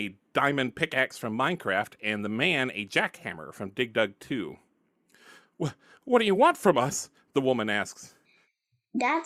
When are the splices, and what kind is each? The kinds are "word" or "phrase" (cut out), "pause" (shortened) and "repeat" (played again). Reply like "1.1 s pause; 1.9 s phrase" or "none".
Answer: none

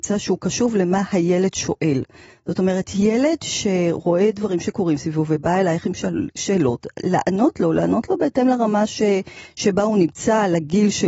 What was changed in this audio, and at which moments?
none

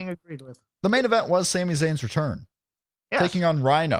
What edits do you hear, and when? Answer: none

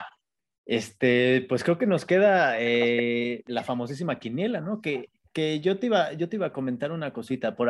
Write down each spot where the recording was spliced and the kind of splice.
none

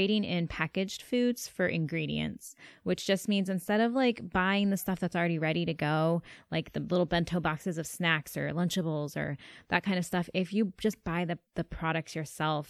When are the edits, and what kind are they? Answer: 11.5 s pause

